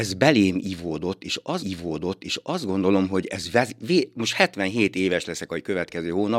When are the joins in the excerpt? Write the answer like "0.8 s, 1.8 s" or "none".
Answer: 1.6 s